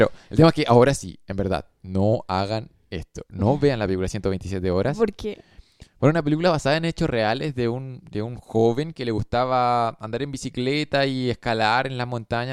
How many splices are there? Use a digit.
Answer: 0